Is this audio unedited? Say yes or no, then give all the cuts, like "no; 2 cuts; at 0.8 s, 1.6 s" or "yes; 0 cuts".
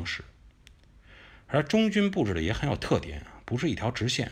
yes; 0 cuts